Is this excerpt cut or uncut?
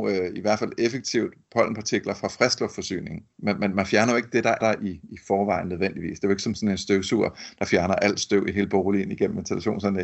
cut